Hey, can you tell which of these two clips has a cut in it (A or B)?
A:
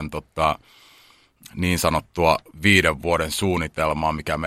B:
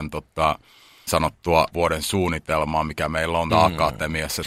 B